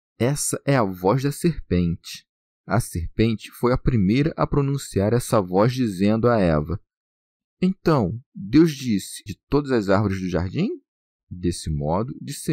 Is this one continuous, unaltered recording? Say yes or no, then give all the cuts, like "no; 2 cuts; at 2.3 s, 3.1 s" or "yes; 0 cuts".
no; 1 cut; at 9.3 s